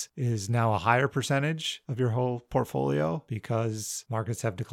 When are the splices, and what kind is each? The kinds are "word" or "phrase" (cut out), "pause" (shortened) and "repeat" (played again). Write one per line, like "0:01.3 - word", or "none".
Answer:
none